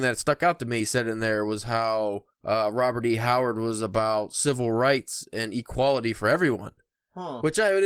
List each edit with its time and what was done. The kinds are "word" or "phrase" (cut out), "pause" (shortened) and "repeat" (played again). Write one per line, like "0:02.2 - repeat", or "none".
0:02.3 - pause